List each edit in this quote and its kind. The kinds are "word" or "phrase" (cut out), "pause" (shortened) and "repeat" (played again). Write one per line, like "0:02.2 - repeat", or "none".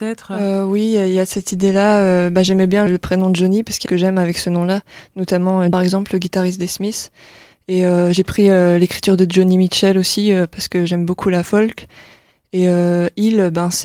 0:02.9 - word
0:03.9 - phrase
0:05.7 - phrase